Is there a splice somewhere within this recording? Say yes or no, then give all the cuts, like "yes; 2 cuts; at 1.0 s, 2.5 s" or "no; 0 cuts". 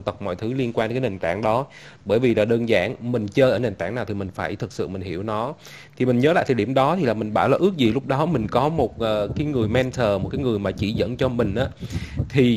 no; 0 cuts